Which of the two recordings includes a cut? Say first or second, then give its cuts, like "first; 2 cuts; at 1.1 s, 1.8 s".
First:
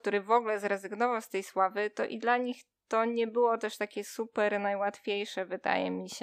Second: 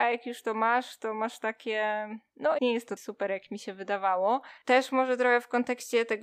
second; 2 cuts; at 2.6 s, 3.0 s